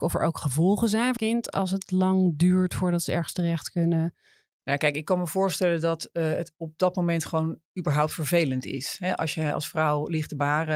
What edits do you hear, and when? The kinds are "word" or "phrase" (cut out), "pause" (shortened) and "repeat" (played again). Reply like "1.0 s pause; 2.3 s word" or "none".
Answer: 1.2 s phrase; 7.7 s pause